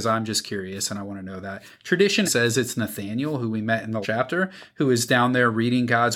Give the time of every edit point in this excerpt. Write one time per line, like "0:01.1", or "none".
0:02.2
0:04.0